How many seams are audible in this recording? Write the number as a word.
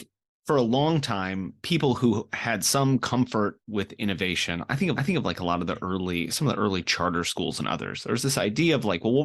two